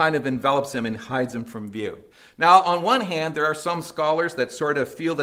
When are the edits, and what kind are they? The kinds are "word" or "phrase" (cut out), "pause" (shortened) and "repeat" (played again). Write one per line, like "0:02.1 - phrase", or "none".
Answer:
0:02.1 - pause